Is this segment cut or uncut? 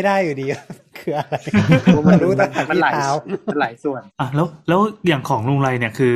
cut